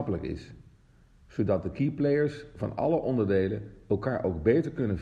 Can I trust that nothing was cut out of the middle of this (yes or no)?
yes